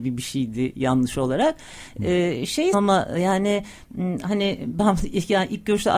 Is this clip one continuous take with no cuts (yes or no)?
no